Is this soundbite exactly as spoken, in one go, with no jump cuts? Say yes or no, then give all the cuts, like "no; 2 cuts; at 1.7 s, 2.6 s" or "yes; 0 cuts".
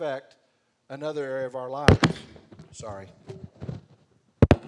yes; 0 cuts